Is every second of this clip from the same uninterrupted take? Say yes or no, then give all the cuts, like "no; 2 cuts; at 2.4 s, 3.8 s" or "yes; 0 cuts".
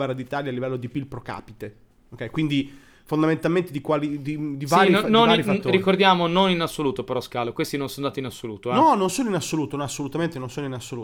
yes; 0 cuts